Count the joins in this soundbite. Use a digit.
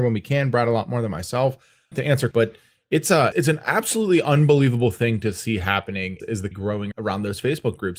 6